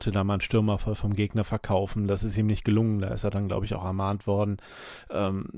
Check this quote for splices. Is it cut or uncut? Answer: uncut